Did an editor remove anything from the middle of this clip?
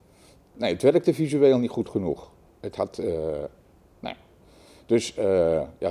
no; 0 cuts

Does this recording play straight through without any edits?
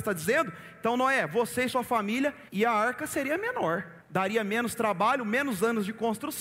no; 2 cuts; at 2.5 s, 4.0 s

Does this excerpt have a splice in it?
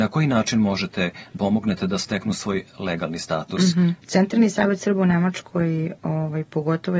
yes; 2 cuts; at 1.4 s, 4.0 s

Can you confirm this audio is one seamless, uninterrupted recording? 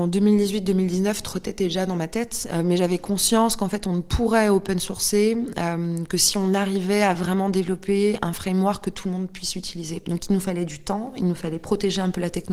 yes; 0 cuts

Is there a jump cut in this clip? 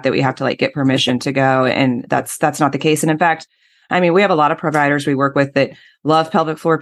no; 0 cuts

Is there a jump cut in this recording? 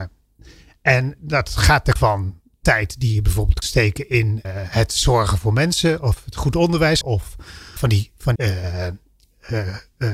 yes; 6 cuts; at 2.0 s, 3.6 s, 4.4 s, 7.0 s, 7.8 s, 8.4 s

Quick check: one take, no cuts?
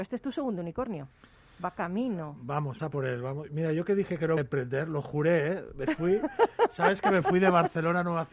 no; 2 cuts; at 2.8 s, 4.4 s

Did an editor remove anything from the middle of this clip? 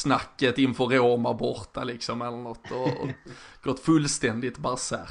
no; 0 cuts

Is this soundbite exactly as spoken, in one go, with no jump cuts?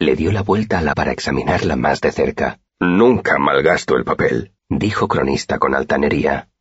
no; 3 cuts; at 0.9 s, 2.7 s, 4.6 s

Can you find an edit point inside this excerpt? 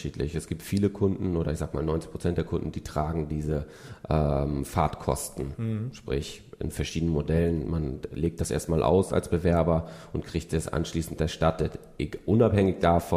no; 0 cuts

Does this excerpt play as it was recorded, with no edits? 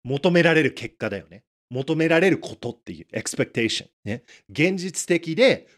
no; 1 cut; at 3.9 s

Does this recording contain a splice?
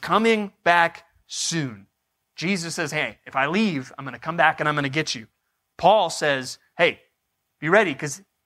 no; 0 cuts

